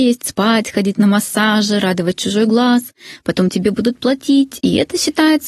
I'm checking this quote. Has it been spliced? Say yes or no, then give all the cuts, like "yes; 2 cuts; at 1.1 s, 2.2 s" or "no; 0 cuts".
no; 0 cuts